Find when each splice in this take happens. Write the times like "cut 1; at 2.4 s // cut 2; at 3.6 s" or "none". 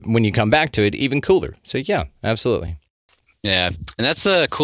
none